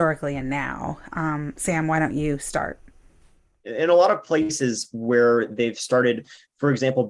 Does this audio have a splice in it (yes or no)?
no